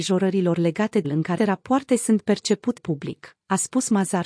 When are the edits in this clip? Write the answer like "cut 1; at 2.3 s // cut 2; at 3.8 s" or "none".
cut 1; at 1.0 s // cut 2; at 1.4 s // cut 3; at 2.8 s